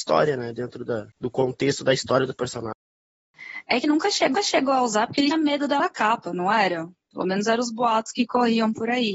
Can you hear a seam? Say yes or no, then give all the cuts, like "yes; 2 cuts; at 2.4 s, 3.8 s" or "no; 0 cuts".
yes; 5 cuts; at 1.1 s, 3.8 s, 4.3 s, 5.3 s, 5.8 s